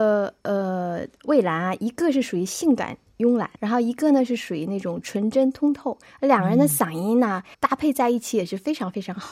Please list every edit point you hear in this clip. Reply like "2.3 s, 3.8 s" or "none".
3.6 s, 7.5 s